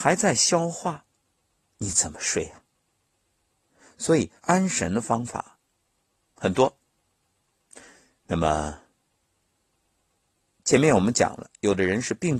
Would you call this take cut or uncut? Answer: cut